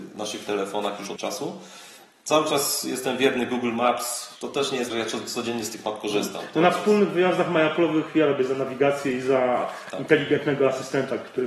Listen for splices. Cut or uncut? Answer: cut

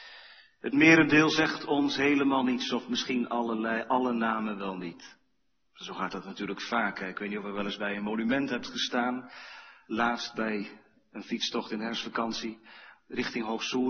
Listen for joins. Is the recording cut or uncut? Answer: uncut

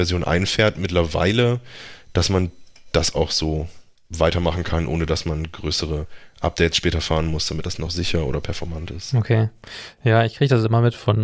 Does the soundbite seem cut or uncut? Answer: uncut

